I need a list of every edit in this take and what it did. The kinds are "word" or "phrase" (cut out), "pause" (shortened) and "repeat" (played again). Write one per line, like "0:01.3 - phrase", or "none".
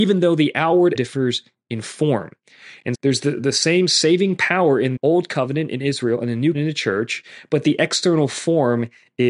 0:00.9 - word
0:02.9 - word
0:05.0 - word
0:06.5 - word